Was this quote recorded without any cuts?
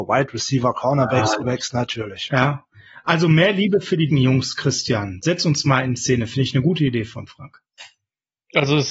no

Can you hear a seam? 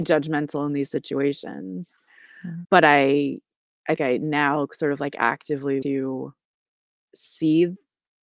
yes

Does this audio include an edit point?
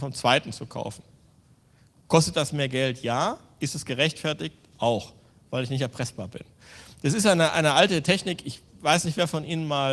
no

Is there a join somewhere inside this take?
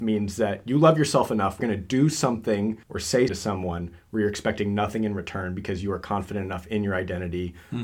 yes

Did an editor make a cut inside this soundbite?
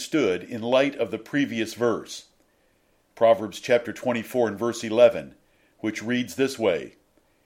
no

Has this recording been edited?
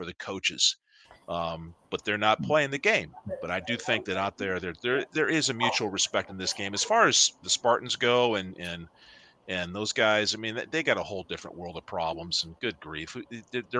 no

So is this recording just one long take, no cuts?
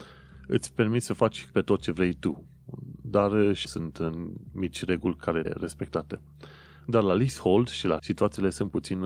no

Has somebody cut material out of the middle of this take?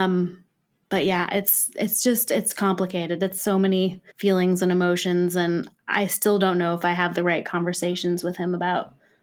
yes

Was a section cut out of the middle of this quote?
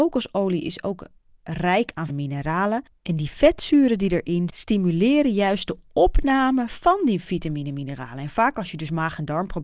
yes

